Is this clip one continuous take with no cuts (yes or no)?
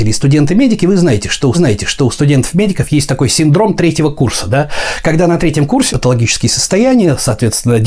no